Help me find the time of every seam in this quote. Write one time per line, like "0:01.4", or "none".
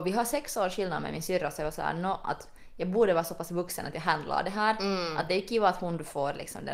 none

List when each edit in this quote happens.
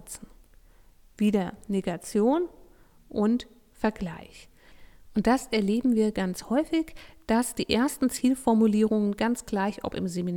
none

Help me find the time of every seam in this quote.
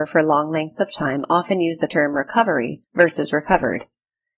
0:01.9
0:02.8

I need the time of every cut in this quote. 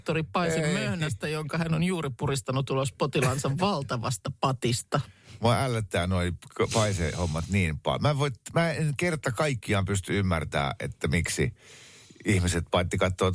none

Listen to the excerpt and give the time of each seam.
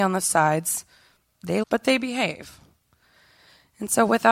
0:01.6

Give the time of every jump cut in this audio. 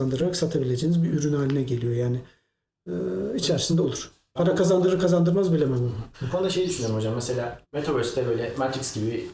0:03.8
0:06.1
0:07.6

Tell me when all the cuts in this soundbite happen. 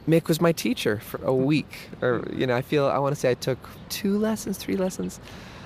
0:01.1
0:03.8

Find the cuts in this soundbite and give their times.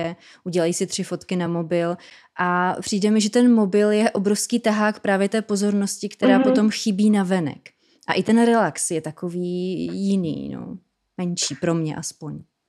none

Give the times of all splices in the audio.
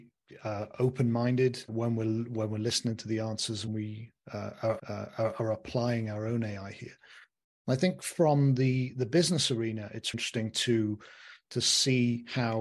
0:01.7
0:03.7
0:04.8
0:10.1

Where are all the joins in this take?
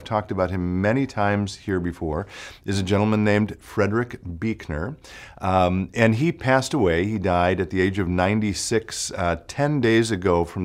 none

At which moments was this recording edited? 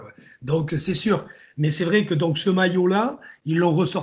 none

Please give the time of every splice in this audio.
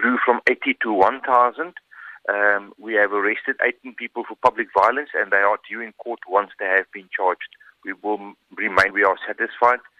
0:08.9

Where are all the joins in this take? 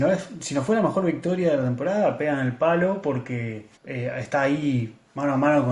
0:03.8

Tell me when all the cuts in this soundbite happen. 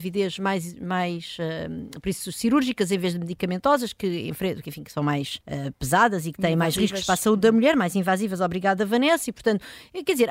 0:05.4

